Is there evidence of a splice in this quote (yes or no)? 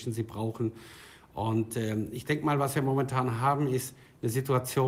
no